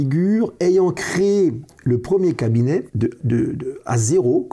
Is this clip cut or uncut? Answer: cut